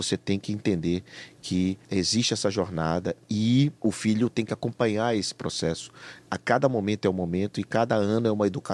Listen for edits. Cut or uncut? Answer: cut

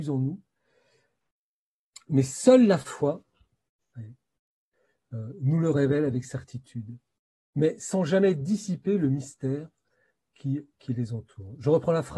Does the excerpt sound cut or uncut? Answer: uncut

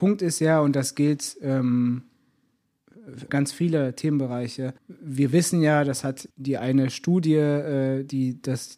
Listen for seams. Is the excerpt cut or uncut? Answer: cut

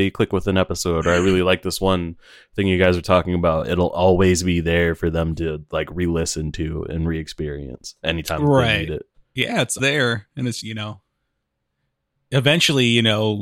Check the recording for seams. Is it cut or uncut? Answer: cut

